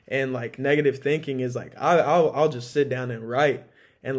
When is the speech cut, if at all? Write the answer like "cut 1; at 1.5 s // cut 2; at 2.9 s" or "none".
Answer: none

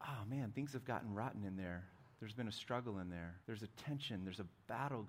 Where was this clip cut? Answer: cut 1; at 3.4 s

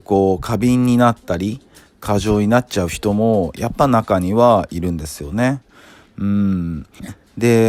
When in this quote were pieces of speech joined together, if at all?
none

